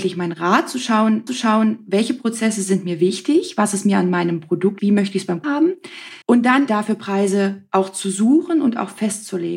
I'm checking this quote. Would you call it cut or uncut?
cut